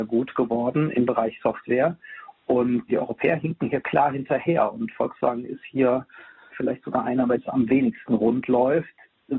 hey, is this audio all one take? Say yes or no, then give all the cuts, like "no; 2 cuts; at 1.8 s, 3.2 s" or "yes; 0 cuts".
no; 3 cuts; at 2.9 s, 6.5 s, 7.4 s